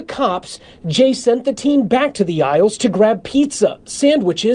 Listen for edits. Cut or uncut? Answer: uncut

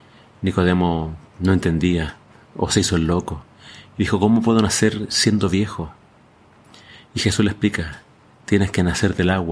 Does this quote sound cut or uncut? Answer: uncut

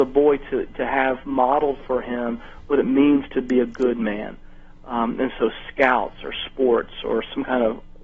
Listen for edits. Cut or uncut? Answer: uncut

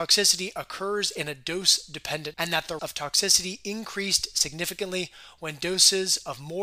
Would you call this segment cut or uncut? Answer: cut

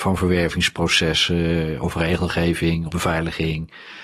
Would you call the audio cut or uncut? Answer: cut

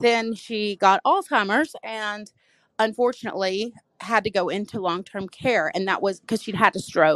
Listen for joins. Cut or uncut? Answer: cut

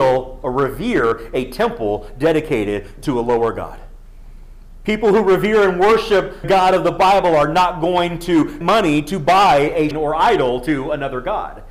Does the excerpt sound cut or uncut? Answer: cut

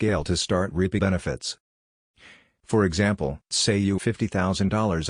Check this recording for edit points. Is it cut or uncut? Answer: cut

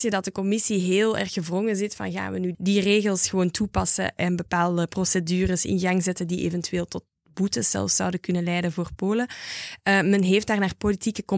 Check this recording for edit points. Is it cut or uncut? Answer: cut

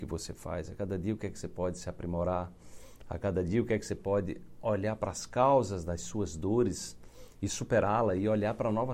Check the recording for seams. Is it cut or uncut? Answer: uncut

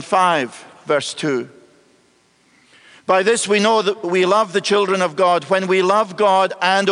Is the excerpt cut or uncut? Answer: uncut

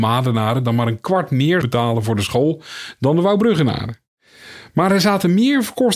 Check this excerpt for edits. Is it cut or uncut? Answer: cut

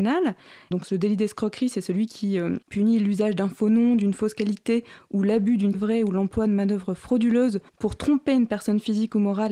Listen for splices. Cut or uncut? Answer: cut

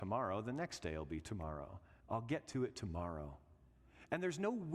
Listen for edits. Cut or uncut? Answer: cut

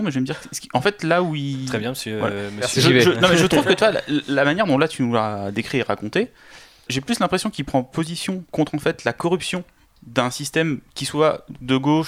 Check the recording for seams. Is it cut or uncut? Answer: cut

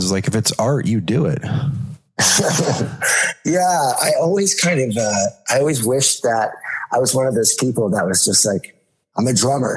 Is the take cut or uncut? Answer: uncut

